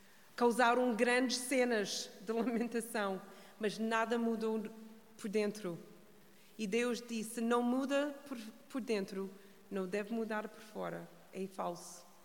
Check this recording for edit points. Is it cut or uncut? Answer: uncut